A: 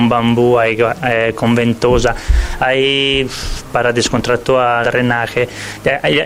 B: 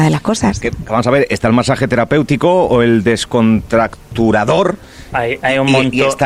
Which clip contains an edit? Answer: A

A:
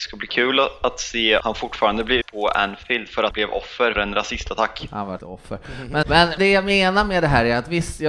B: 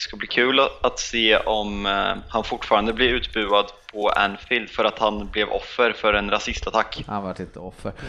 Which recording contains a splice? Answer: A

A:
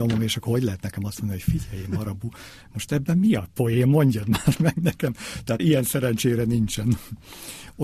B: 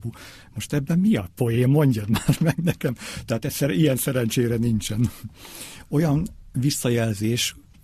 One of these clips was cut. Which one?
A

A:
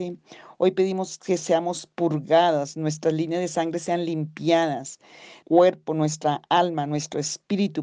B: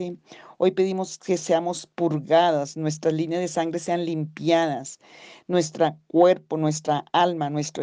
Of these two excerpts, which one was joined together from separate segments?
A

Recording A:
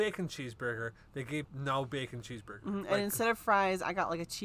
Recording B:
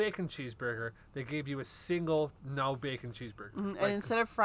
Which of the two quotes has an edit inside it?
A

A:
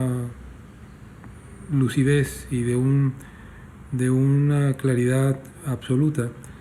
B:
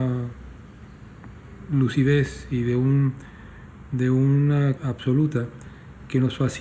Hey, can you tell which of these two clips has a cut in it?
B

